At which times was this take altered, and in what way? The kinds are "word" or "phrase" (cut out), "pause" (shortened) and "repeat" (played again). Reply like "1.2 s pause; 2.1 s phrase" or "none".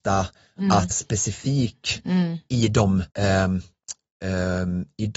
0.9 s phrase; 3.1 s pause